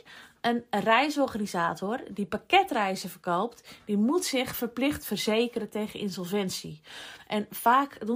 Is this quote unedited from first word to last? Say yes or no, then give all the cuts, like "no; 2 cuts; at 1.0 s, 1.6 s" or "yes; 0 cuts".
yes; 0 cuts